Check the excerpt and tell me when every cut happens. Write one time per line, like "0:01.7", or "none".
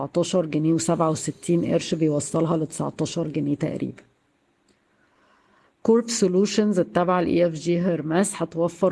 none